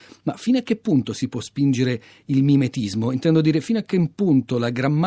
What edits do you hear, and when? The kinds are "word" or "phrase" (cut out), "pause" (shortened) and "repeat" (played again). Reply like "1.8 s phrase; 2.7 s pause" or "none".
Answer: none